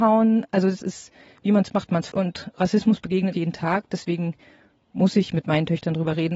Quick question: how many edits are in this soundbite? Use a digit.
3